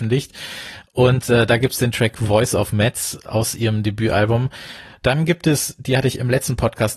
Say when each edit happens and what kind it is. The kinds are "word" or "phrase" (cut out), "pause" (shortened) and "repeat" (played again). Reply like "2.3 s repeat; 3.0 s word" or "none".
none